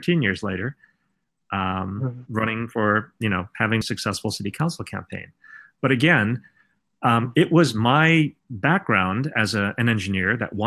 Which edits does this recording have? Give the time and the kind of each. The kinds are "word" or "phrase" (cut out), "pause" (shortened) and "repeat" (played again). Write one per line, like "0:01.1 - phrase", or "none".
0:03.8 - phrase
0:08.4 - pause